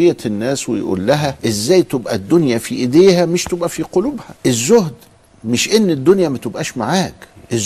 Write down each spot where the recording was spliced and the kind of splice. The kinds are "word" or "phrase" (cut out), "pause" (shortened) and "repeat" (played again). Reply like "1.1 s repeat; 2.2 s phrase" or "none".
1.4 s pause; 4.4 s pause